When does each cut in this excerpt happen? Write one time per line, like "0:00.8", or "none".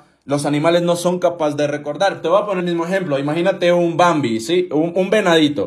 0:02.6